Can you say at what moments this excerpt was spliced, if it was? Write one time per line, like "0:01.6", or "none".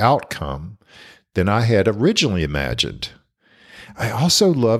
none